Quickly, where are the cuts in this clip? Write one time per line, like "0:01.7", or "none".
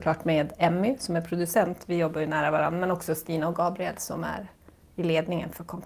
none